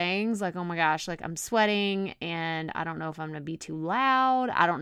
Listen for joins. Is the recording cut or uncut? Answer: uncut